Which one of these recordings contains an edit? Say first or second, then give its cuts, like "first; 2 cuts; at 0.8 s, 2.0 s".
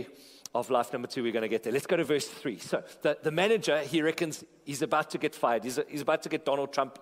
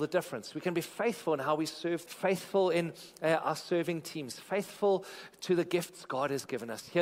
second; 1 cut; at 2.1 s